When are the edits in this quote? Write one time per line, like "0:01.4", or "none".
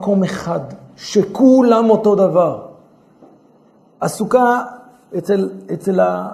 none